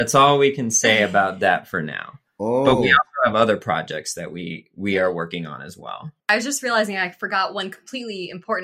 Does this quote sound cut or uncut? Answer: cut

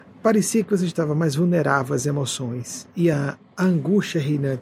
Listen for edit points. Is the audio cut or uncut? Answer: uncut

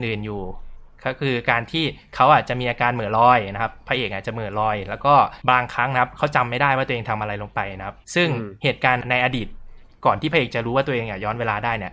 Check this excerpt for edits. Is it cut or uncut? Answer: cut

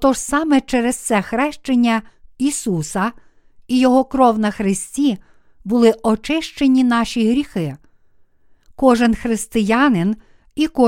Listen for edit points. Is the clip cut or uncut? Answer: uncut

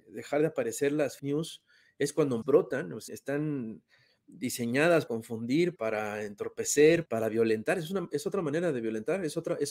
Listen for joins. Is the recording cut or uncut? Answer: cut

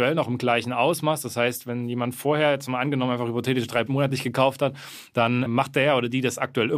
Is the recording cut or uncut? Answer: cut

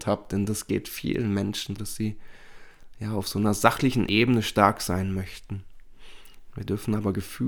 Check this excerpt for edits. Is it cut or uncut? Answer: cut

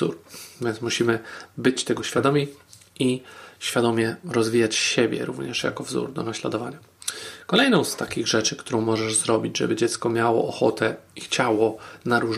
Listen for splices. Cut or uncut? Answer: cut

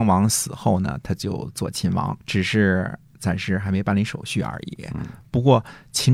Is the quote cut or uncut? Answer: cut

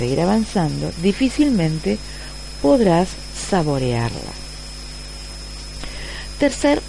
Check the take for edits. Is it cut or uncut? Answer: uncut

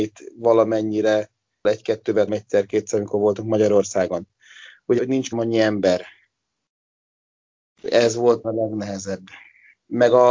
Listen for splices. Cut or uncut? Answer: cut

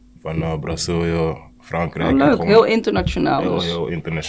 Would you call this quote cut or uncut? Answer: uncut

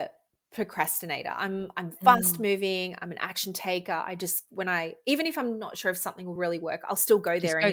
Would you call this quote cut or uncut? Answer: uncut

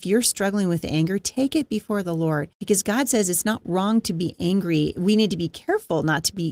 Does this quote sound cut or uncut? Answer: cut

